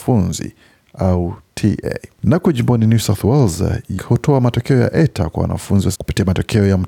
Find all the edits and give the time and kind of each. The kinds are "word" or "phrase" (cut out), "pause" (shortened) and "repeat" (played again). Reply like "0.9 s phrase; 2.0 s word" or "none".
2.1 s pause; 4.0 s word; 5.9 s word